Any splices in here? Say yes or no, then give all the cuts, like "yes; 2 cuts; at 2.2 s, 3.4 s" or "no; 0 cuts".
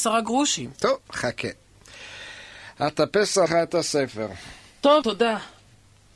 yes; 2 cuts; at 3.5 s, 5.0 s